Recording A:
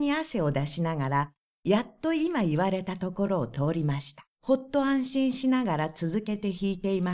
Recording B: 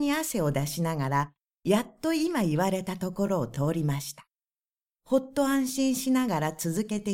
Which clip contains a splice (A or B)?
A